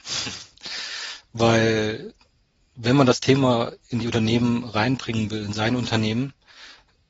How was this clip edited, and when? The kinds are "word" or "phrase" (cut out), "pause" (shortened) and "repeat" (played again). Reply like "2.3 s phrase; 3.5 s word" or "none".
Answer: none